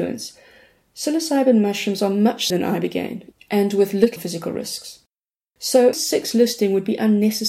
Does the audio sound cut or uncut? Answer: cut